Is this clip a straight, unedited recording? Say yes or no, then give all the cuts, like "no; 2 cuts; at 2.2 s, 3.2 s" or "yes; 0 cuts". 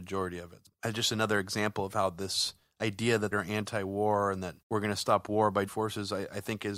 no; 3 cuts; at 3.3 s, 4.6 s, 5.7 s